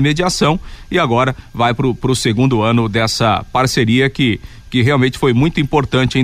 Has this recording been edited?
no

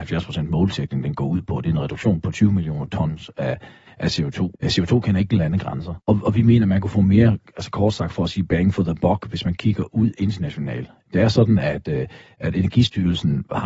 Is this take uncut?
no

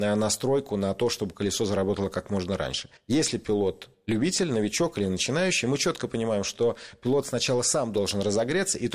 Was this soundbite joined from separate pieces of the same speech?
no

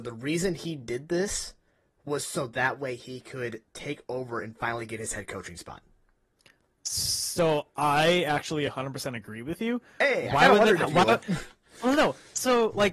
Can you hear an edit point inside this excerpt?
no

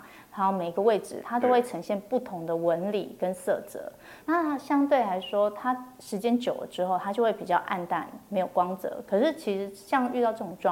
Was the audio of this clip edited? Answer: yes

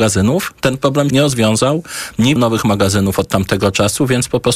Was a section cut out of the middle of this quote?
yes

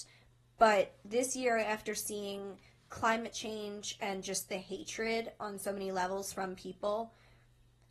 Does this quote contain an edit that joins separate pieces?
no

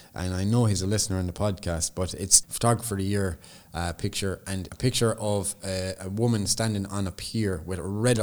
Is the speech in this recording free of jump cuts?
no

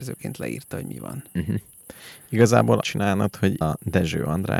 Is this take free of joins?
no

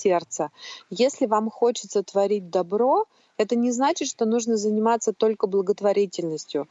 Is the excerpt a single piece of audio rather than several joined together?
yes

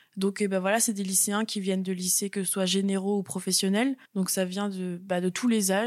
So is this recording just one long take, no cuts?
no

